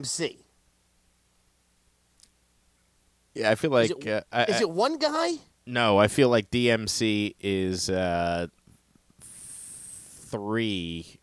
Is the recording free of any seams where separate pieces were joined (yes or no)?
yes